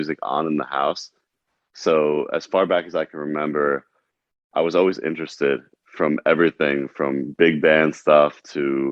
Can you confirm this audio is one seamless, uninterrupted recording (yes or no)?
yes